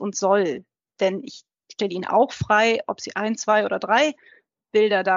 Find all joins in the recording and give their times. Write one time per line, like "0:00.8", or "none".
none